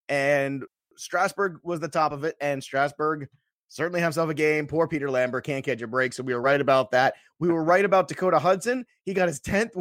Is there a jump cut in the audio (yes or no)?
no